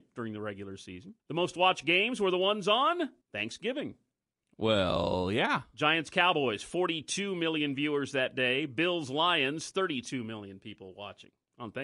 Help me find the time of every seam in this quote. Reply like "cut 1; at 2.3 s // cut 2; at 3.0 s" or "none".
cut 1; at 1.2 s // cut 2; at 3.2 s